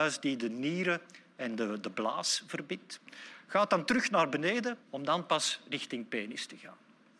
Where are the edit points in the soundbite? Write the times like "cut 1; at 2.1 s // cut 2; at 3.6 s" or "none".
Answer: cut 1; at 4.8 s